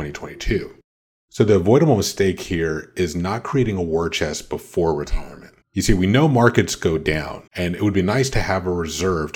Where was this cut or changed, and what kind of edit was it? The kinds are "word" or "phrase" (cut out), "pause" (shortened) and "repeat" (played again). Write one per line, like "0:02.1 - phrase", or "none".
0:05.6 - pause
0:07.5 - pause